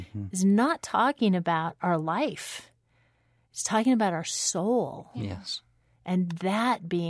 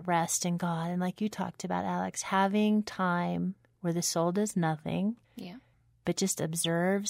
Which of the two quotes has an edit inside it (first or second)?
second